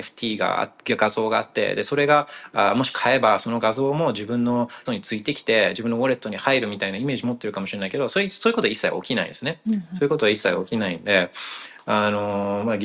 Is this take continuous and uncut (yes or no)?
no